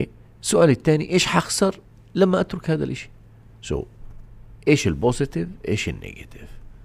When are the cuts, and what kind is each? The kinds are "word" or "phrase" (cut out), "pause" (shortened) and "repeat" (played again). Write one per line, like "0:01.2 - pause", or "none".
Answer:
none